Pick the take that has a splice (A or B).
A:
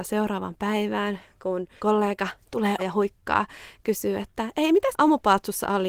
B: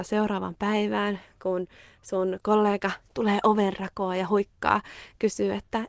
A